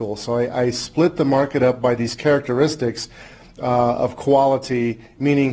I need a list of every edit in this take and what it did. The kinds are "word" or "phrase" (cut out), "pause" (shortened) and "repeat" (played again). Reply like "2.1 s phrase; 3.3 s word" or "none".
none